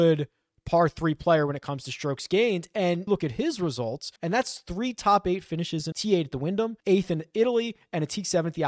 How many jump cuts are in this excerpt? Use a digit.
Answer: 4